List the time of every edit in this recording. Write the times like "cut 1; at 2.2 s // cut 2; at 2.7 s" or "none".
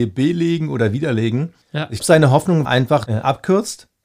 cut 1; at 1.6 s // cut 2; at 2.0 s // cut 3; at 2.6 s // cut 4; at 3.1 s